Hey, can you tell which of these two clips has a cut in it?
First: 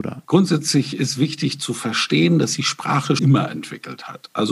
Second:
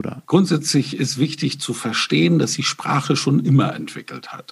first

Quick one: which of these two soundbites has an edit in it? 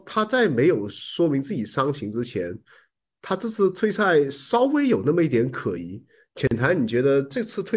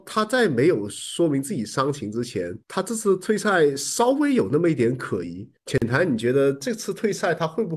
second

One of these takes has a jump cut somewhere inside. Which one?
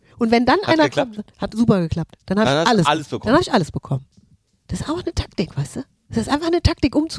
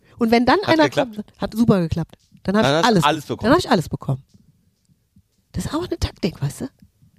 first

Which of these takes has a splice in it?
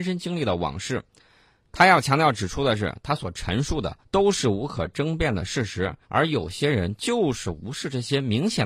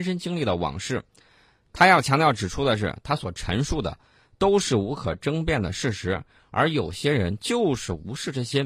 first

